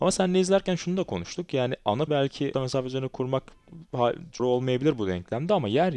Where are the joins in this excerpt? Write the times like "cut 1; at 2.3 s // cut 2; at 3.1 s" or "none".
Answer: cut 1; at 2.1 s // cut 2; at 2.5 s // cut 3; at 4.4 s